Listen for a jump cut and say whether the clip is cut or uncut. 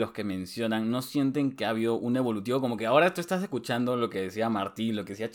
uncut